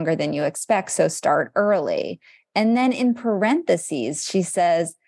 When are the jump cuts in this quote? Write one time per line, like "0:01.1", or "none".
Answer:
none